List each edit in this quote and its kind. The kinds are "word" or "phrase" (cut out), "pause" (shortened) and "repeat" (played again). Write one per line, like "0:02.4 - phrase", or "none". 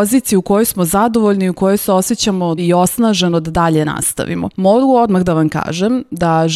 0:02.6 - word
0:04.5 - pause